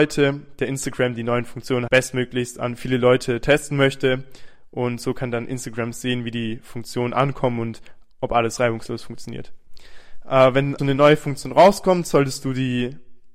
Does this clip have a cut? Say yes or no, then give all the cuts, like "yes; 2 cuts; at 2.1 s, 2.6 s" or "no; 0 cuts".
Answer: yes; 2 cuts; at 1.9 s, 10.8 s